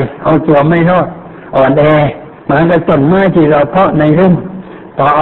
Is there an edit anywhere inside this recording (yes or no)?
yes